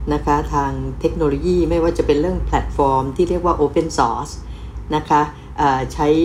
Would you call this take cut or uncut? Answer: uncut